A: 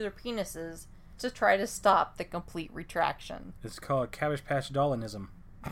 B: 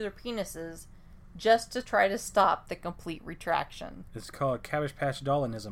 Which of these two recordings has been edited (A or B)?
A